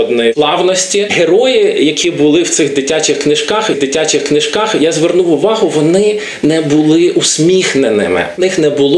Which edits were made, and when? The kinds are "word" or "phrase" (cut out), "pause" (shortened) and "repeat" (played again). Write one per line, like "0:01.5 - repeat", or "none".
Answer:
0:03.7 - repeat